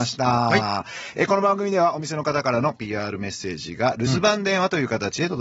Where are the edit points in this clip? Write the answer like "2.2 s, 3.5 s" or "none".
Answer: none

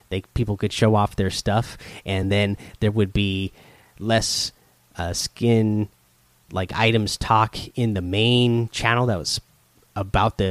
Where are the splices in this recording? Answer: none

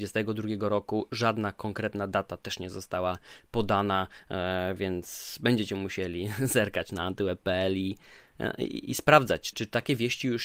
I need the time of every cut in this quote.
9.5 s

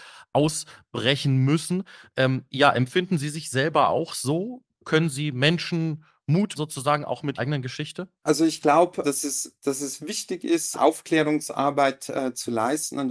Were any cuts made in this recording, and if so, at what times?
6.6 s, 7.4 s, 9.0 s, 10.7 s

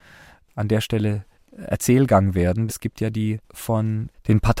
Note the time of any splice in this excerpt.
1.3 s, 2.7 s

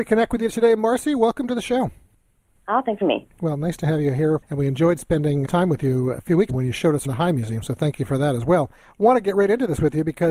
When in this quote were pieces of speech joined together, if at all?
3.0 s, 5.4 s, 6.2 s, 6.5 s, 7.0 s

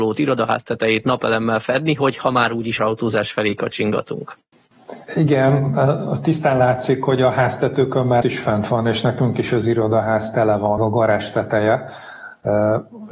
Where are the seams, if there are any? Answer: 2.8 s, 5.0 s, 8.2 s, 10.8 s

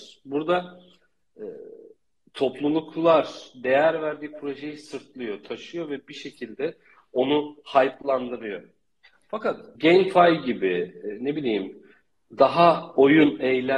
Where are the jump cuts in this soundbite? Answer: none

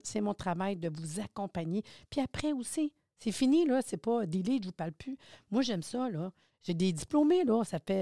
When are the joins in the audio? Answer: none

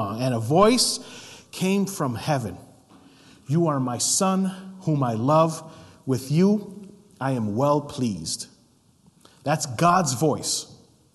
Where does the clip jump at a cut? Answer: none

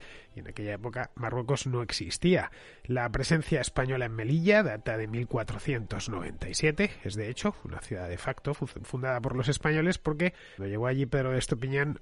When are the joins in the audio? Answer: 10.6 s

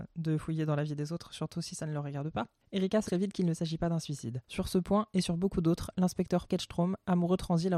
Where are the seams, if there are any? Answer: 3.1 s, 6.5 s

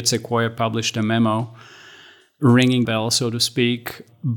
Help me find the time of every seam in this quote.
2.9 s

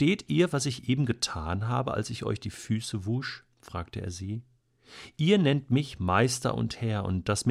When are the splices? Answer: 3.5 s

